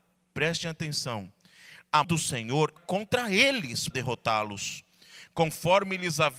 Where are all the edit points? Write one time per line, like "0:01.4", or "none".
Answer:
0:02.0
0:02.8
0:03.9

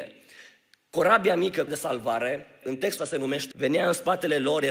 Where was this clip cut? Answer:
0:01.7
0:02.6
0:03.0
0:03.5

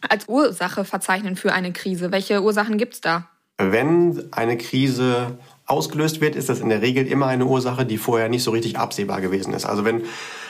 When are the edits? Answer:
none

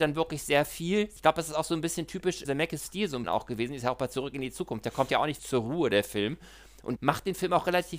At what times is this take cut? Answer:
0:02.4
0:03.2
0:05.4
0:07.0

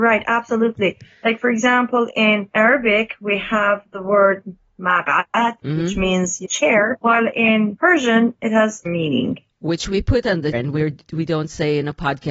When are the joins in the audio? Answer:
0:06.4
0:08.9
0:10.5

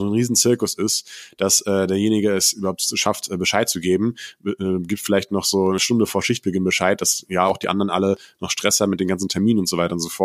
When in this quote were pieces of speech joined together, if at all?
none

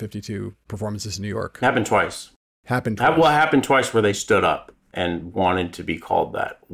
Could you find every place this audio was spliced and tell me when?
none

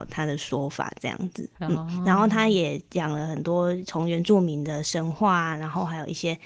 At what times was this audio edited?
0:01.5

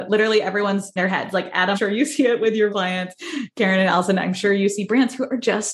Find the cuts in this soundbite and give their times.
0:01.0
0:01.7
0:02.7

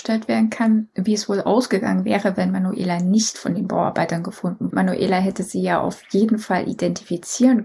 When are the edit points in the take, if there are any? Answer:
0:04.7

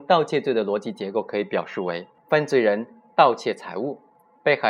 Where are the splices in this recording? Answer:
0:02.2

